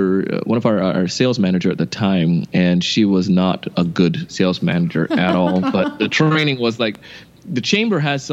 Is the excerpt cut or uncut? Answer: uncut